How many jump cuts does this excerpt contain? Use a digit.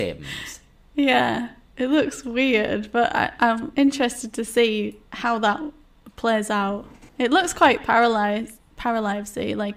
2